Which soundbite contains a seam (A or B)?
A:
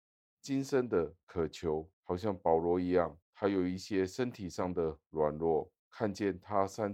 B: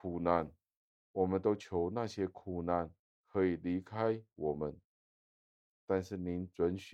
A